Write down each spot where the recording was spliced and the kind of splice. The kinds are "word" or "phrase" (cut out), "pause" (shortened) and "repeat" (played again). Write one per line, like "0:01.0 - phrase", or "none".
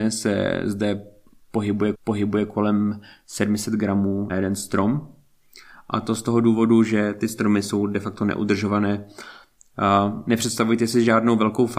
0:01.9 - repeat
0:04.3 - word